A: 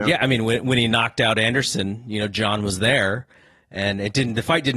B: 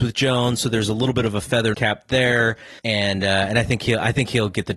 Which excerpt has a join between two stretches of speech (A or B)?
B